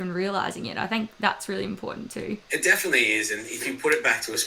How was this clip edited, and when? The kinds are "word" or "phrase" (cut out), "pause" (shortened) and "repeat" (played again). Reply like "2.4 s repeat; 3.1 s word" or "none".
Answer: 2.4 s pause